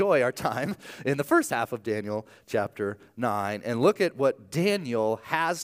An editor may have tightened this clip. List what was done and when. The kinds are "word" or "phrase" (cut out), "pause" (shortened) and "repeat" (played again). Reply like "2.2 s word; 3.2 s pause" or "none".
none